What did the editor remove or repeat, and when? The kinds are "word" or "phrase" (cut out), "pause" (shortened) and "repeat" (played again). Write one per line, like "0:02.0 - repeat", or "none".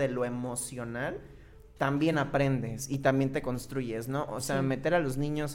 none